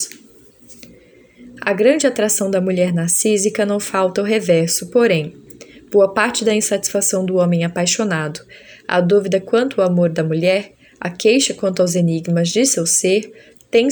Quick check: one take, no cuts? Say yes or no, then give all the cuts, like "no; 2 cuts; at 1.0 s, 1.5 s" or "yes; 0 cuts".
yes; 0 cuts